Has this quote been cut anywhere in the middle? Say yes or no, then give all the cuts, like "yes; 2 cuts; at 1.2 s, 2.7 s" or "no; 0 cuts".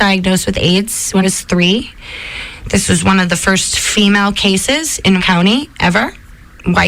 yes; 2 cuts; at 1.2 s, 5.2 s